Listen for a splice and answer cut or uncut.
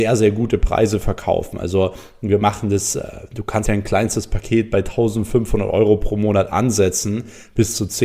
cut